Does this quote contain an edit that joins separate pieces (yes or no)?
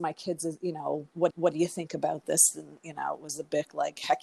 yes